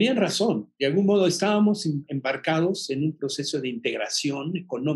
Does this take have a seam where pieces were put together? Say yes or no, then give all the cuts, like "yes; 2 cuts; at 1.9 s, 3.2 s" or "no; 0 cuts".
no; 0 cuts